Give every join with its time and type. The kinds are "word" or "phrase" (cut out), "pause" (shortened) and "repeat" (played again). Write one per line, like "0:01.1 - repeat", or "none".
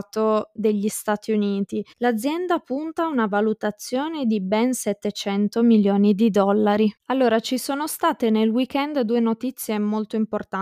0:01.9 - pause
0:07.0 - pause